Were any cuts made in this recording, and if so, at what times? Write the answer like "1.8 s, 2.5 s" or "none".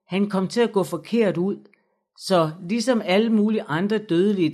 none